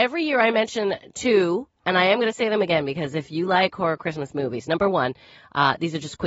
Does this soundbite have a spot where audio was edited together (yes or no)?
no